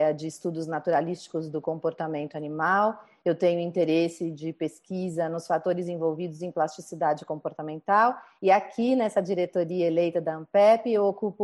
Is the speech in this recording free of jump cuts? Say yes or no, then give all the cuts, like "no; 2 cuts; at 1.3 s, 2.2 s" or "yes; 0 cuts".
yes; 0 cuts